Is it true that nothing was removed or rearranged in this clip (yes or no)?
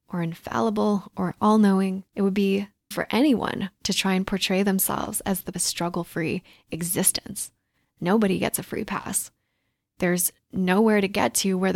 no